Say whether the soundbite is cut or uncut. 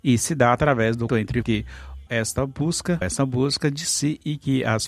cut